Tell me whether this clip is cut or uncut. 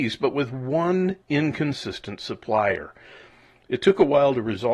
cut